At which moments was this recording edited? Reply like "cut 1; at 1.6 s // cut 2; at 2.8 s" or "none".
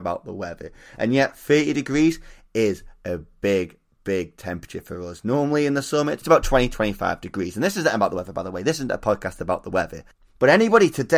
none